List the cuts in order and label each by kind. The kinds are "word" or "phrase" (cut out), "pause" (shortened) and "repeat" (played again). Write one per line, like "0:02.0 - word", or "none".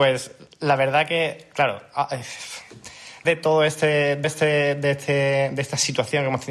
0:03.2 - word
0:04.2 - repeat